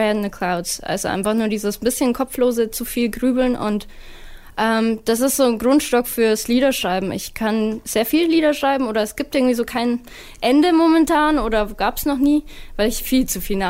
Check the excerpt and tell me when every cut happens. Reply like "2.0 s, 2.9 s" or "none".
none